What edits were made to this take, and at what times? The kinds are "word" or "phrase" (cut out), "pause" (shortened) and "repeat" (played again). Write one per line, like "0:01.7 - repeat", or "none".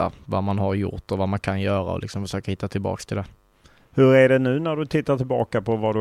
none